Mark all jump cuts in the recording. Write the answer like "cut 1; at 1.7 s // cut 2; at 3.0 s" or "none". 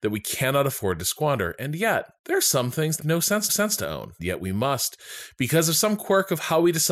cut 1; at 2.2 s // cut 2; at 3.0 s // cut 3; at 3.5 s // cut 4; at 4.2 s

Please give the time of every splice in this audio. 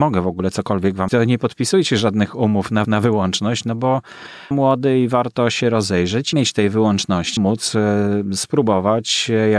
cut 1; at 1.1 s // cut 2; at 2.8 s // cut 3; at 4.5 s // cut 4; at 6.3 s // cut 5; at 7.4 s

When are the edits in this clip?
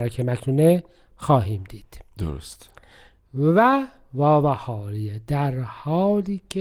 none

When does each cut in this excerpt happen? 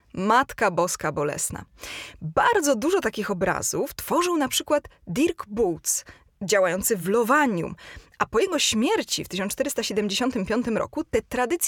none

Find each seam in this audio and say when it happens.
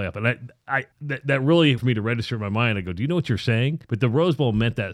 cut 1; at 0.9 s // cut 2; at 1.8 s // cut 3; at 3.8 s

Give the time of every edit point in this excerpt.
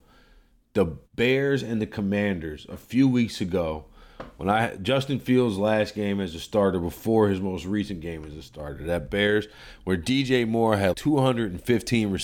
cut 1; at 1.1 s // cut 2; at 10.9 s

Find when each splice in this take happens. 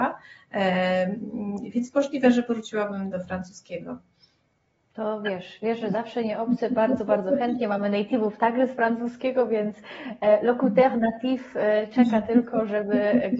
cut 1; at 3.1 s

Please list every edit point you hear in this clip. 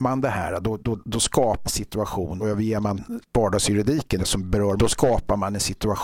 cut 1; at 1.6 s // cut 2; at 2.4 s // cut 3; at 4.2 s // cut 4; at 4.8 s

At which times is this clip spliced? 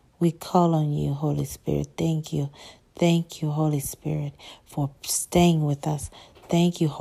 none

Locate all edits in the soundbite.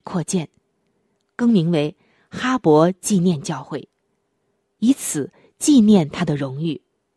none

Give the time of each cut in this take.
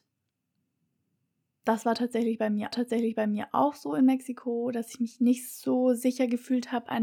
cut 1; at 2.7 s

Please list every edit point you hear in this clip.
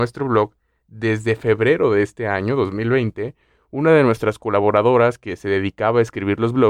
none

